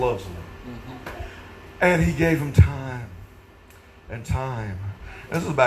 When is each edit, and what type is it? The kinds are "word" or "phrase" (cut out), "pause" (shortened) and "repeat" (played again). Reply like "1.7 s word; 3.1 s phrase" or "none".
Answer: none